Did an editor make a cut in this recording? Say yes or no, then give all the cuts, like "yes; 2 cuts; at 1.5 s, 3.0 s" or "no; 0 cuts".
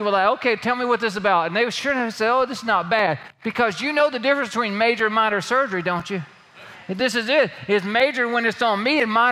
no; 0 cuts